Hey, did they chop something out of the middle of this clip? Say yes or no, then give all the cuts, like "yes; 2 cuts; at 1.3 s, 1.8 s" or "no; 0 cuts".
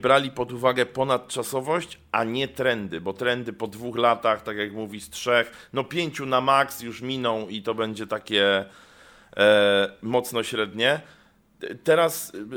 no; 0 cuts